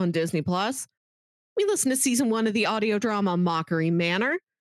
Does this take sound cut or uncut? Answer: uncut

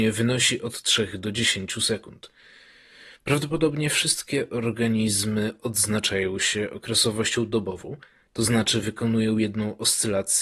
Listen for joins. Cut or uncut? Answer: uncut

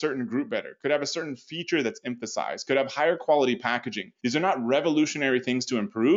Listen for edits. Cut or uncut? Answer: cut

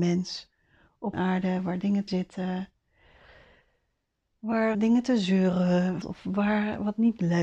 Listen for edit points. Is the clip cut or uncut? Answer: cut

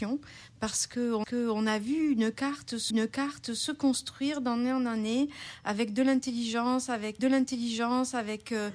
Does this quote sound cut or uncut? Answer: cut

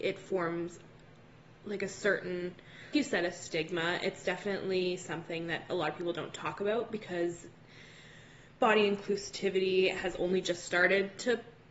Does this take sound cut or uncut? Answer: cut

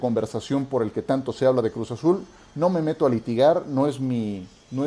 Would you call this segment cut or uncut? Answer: uncut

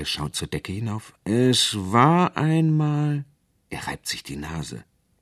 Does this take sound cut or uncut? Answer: uncut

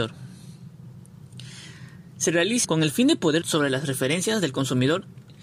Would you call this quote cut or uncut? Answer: cut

